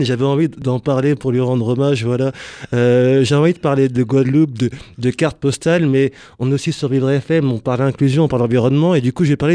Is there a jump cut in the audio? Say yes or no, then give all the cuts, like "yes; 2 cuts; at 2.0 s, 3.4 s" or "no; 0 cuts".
no; 0 cuts